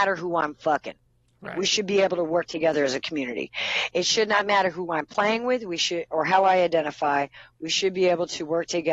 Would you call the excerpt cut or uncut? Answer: uncut